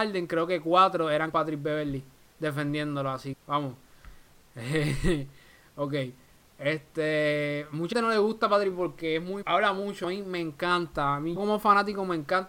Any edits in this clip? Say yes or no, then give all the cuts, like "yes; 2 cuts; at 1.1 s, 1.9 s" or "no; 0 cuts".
yes; 7 cuts; at 1.3 s, 3.3 s, 7.9 s, 8.7 s, 9.4 s, 10.0 s, 11.4 s